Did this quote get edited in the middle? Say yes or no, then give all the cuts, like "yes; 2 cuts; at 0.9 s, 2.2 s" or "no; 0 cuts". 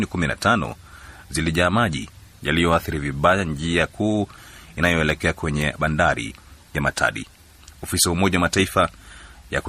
no; 0 cuts